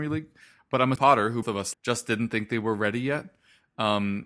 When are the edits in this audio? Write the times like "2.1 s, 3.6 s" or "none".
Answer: 1.0 s, 1.4 s, 1.7 s

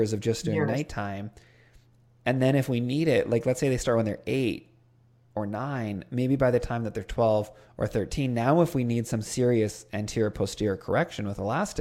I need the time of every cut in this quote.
none

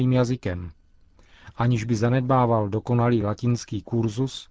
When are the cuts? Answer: none

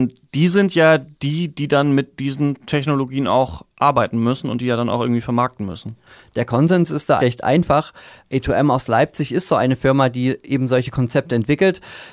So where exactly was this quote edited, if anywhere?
7.2 s

